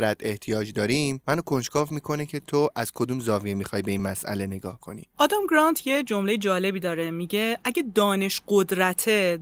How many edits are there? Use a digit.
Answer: 0